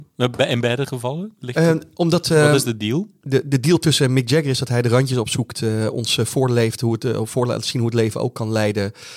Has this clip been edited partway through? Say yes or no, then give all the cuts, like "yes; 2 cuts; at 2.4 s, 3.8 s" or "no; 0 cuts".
no; 0 cuts